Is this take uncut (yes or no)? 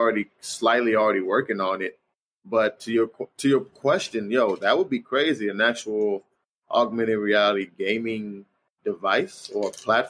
yes